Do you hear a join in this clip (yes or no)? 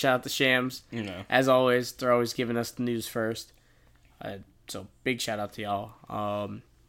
no